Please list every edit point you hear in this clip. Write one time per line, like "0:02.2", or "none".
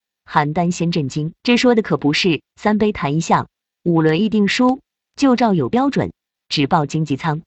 0:01.4